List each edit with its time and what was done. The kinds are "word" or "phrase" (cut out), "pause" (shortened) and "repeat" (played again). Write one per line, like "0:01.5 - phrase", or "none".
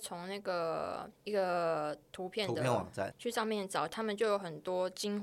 0:01.1 - word
0:03.1 - word

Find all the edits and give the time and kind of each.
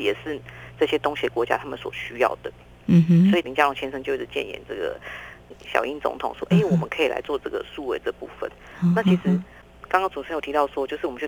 none

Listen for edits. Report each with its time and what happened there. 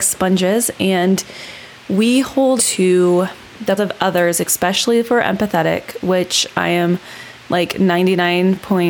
0:02.6 - word
0:03.8 - word

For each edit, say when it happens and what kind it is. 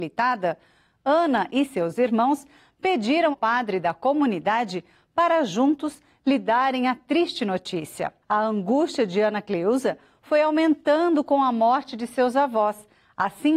0:03.3 - word
0:08.2 - pause

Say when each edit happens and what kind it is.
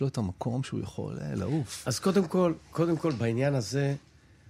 none

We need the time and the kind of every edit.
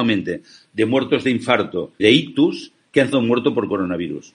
0:02.0 - word
0:03.1 - word

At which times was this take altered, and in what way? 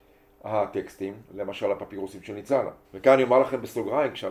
0:01.3 - pause
0:02.8 - pause

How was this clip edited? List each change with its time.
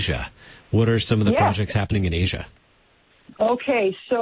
none

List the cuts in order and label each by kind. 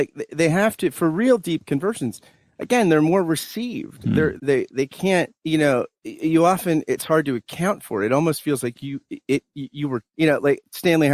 0:04.4 - word
0:04.7 - word

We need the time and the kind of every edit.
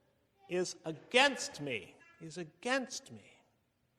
0:02.0 - pause

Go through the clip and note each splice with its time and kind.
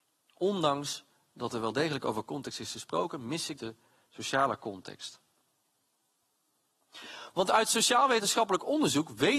0:03.6 - word

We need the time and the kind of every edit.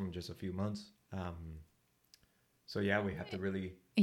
0:00.9 - word

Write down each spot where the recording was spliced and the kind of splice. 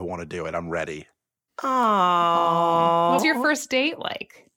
0:03.2 - word

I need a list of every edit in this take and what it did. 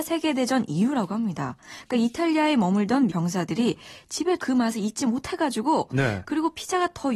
0:03.1 - word
0:04.4 - word

